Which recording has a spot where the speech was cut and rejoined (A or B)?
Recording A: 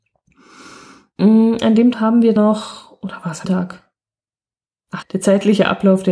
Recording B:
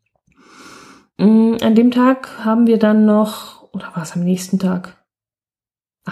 A